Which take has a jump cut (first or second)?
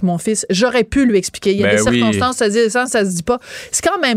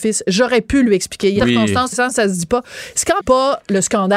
second